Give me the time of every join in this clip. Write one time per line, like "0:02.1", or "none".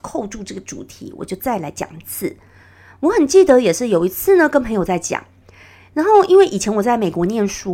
none